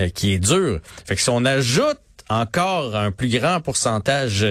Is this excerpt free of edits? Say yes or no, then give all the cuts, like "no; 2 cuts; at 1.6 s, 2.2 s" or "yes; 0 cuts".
yes; 0 cuts